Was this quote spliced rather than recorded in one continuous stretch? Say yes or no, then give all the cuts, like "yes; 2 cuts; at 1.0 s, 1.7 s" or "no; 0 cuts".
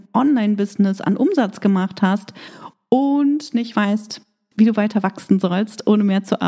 no; 0 cuts